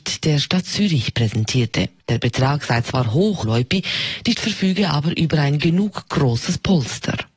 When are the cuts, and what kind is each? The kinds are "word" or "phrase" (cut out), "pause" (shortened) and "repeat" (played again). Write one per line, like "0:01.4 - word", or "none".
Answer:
0:02.0 - pause
0:03.4 - word
0:04.3 - word